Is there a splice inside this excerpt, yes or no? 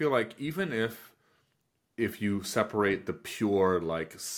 no